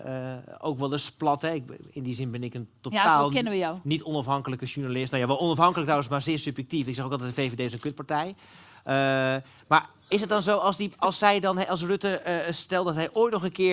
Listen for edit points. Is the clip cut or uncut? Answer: uncut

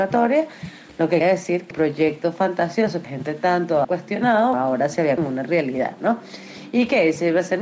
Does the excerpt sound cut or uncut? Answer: cut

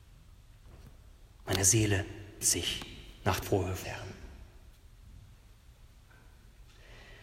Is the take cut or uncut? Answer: cut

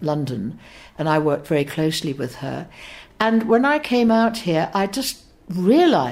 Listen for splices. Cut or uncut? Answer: uncut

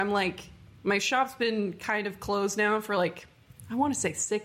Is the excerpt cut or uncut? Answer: uncut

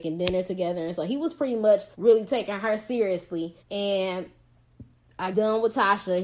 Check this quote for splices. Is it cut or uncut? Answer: cut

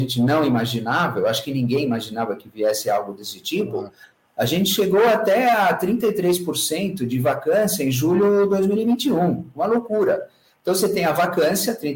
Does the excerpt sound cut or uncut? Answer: uncut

